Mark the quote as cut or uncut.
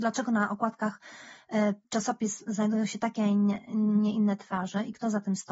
cut